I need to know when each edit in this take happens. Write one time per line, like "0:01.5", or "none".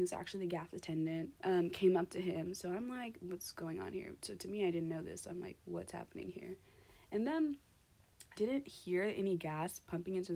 0:01.4
0:08.4